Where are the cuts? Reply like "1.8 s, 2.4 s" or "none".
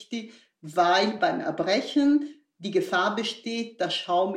none